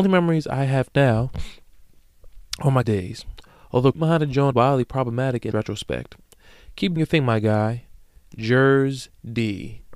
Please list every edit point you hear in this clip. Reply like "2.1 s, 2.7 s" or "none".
2.8 s, 3.9 s, 4.5 s, 5.5 s, 7.0 s